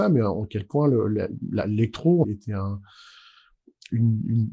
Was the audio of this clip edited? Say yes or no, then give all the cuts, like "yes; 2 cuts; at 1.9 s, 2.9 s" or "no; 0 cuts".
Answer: yes; 1 cut; at 2.2 s